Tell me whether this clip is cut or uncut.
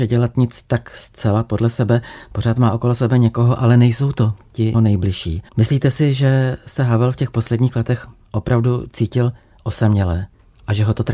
cut